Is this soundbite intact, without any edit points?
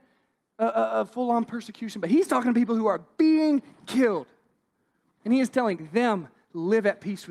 yes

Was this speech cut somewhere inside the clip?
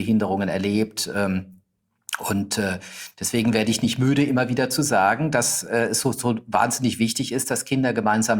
no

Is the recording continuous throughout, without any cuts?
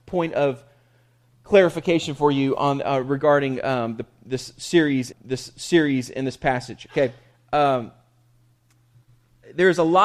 no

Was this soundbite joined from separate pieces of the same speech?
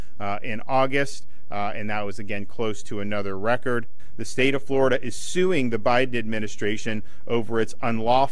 no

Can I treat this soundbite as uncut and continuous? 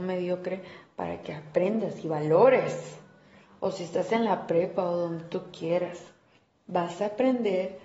yes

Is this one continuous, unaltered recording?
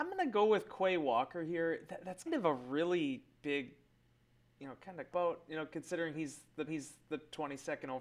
no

